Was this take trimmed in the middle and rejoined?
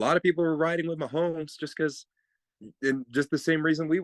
no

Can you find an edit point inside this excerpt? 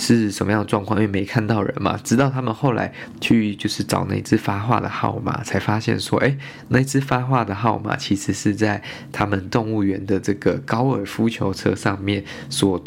no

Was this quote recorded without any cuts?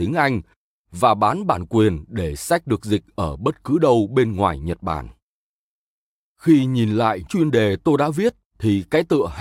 no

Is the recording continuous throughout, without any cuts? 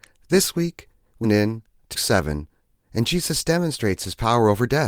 no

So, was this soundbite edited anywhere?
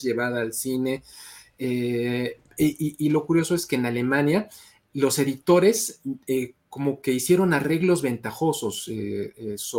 no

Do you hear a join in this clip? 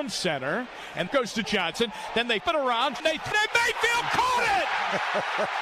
yes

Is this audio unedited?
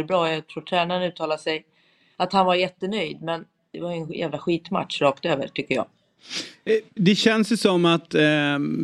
yes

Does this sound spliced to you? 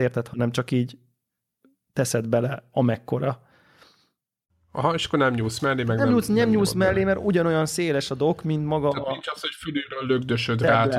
no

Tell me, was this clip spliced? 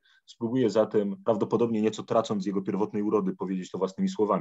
no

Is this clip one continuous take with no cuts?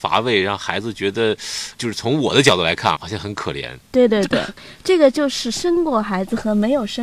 no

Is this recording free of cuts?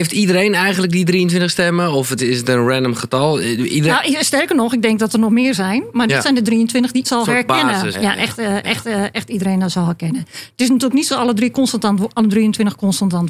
no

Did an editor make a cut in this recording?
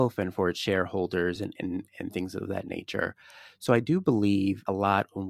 no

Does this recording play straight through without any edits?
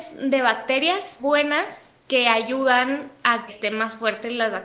no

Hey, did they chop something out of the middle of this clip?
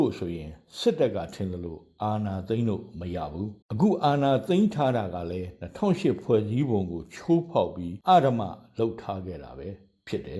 yes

